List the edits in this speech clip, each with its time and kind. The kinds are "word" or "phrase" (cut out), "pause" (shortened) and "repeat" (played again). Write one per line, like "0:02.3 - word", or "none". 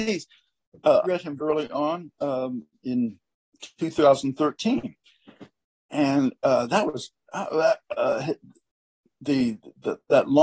0:01.0 - word
0:01.4 - word